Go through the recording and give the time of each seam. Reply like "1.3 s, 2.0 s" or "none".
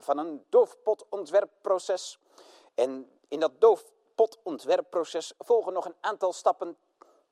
none